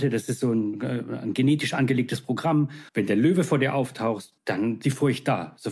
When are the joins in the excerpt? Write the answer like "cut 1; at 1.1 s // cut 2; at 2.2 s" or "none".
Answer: cut 1; at 2.9 s // cut 2; at 4.8 s